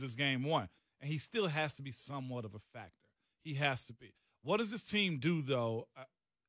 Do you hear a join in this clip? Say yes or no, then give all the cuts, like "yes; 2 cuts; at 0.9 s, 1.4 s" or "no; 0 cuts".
no; 0 cuts